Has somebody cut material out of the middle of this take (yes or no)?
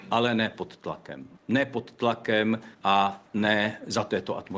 yes